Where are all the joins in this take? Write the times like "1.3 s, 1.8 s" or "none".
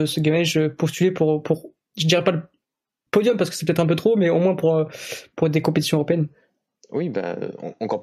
none